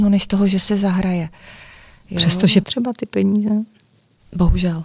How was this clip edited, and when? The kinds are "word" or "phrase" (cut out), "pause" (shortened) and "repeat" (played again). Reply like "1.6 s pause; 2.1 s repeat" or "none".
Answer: 2.6 s word